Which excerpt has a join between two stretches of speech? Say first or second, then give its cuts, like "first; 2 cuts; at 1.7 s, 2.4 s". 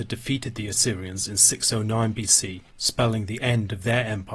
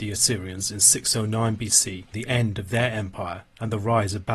second; 1 cut; at 2.1 s